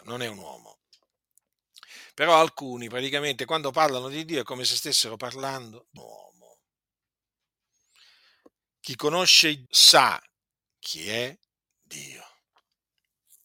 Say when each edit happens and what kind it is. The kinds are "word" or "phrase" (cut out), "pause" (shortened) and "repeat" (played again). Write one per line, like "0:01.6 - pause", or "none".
0:06.0 - word
0:09.7 - word